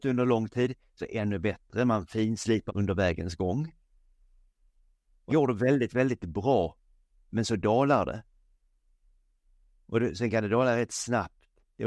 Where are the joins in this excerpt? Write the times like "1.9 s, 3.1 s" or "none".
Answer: 1.0 s, 2.7 s, 5.3 s